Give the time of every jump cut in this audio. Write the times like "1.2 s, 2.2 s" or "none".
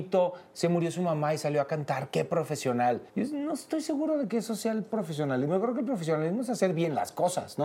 3.1 s